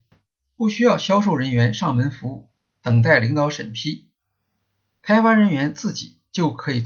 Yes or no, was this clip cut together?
no